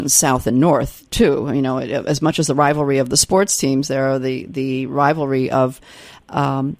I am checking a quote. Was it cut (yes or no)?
no